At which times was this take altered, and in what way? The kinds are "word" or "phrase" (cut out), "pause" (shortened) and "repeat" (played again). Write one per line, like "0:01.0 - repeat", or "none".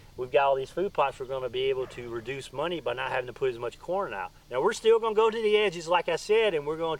0:04.4 - pause